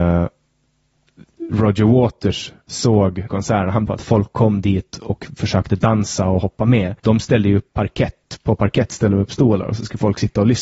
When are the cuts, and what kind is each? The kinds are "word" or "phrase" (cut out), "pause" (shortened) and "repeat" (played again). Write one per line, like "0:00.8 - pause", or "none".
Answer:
0:03.3 - phrase
0:03.9 - phrase
0:07.0 - pause